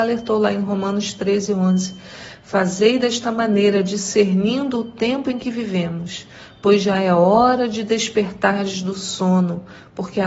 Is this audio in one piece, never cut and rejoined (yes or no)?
yes